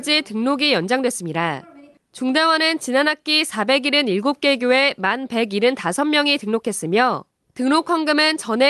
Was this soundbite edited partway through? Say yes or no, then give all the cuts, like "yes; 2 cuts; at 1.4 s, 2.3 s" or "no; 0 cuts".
no; 0 cuts